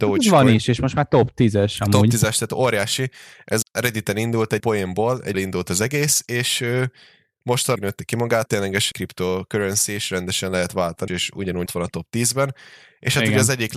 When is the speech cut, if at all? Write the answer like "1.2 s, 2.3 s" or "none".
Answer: 3.6 s, 4.6 s, 5.3 s, 7.8 s, 8.5 s, 8.9 s, 11.1 s, 11.7 s